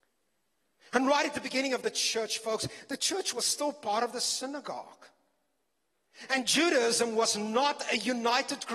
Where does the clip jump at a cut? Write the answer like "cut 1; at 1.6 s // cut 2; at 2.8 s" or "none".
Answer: none